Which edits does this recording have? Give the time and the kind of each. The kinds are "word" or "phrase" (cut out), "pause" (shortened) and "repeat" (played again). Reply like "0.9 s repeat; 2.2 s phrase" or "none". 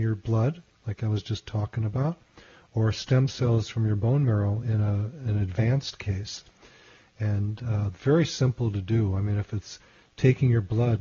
none